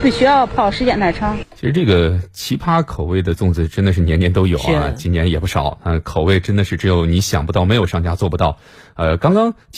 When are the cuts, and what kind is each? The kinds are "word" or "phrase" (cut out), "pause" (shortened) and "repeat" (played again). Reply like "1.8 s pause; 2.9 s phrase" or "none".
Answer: 1.5 s pause